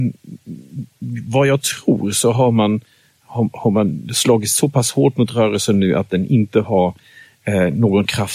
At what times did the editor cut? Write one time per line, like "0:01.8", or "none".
none